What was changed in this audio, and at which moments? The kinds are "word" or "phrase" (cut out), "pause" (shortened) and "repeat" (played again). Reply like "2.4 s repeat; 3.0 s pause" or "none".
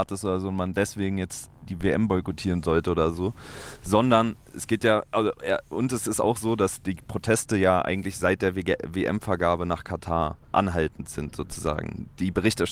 10.4 s pause